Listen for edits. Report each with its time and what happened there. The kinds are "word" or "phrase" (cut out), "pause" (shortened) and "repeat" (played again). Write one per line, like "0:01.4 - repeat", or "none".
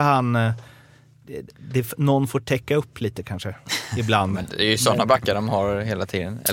none